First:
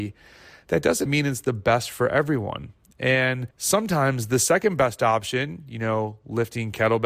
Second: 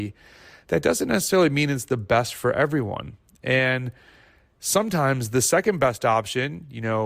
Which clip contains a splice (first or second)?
first